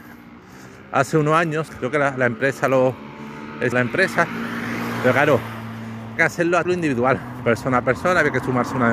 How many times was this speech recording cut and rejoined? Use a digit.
4